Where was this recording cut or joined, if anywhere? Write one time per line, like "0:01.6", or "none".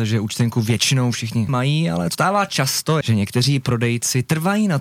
0:01.5
0:02.1
0:03.0